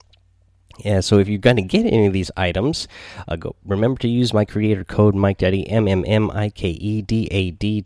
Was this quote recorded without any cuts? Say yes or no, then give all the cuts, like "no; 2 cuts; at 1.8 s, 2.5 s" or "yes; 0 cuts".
yes; 0 cuts